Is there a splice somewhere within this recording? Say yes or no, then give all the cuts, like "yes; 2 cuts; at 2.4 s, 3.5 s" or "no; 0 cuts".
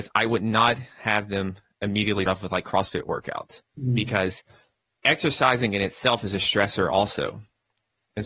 yes; 3 cuts; at 2.3 s, 2.6 s, 3.7 s